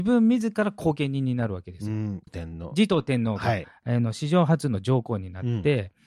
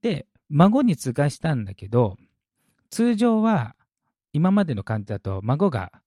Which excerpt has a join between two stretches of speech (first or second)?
first